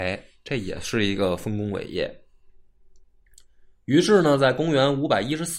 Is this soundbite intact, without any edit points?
yes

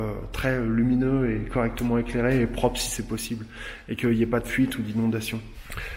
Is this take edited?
no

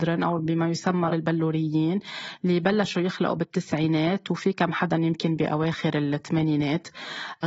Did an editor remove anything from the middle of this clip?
yes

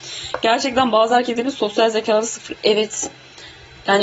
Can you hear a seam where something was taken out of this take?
no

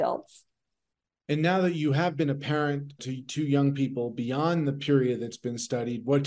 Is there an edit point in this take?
yes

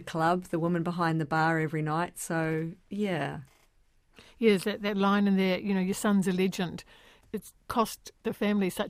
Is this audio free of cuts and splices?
yes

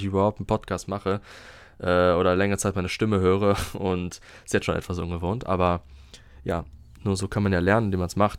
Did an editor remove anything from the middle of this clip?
no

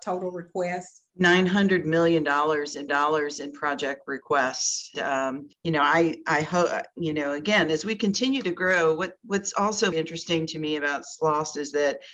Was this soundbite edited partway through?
yes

